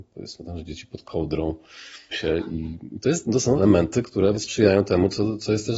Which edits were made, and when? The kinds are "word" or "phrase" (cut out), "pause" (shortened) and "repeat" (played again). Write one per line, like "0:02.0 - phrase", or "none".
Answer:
0:02.1 - word
0:03.2 - word
0:03.6 - word
0:04.3 - word